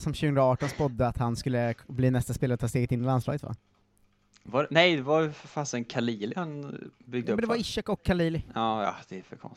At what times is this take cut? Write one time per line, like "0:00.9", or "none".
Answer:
none